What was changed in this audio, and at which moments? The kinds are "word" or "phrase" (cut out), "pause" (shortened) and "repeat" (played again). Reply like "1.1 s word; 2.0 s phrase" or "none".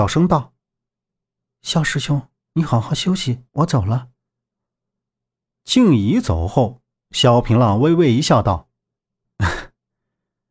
3.5 s pause